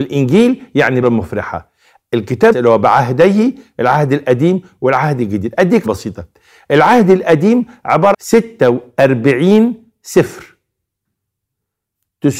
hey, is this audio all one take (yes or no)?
no